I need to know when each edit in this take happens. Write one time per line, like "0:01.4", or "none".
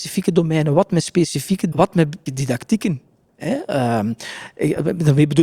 0:01.7
0:02.3